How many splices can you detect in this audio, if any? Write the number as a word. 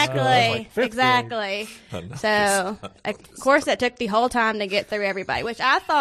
zero